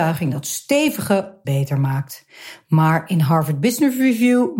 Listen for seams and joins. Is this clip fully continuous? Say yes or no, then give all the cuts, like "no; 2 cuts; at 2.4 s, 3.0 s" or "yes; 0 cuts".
no; 1 cut; at 1.4 s